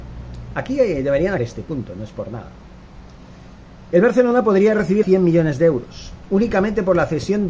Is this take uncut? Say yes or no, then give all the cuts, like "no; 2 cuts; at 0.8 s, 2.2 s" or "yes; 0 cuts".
no; 2 cuts; at 1.4 s, 5.0 s